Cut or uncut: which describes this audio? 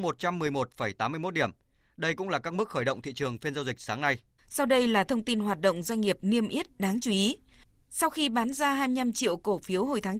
cut